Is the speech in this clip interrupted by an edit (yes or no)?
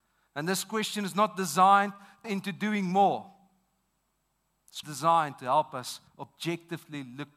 yes